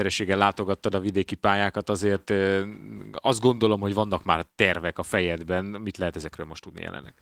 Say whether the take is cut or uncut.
uncut